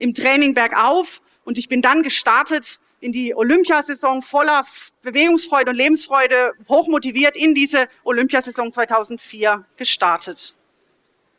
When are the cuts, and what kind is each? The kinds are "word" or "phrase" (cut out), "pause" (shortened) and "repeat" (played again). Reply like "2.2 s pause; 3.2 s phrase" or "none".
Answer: none